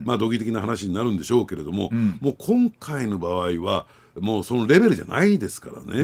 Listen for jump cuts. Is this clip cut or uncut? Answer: uncut